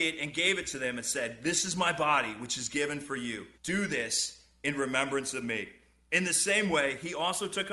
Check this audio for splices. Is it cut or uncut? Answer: cut